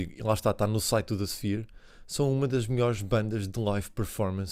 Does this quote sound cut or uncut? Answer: uncut